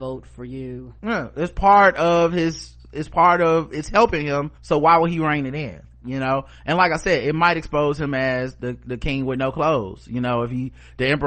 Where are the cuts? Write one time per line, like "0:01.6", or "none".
0:01.0
0:02.8
0:04.6